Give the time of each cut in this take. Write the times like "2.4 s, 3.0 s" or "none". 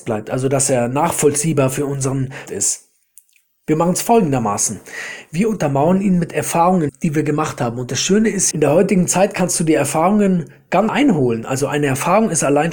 2.5 s, 6.9 s, 8.5 s, 10.9 s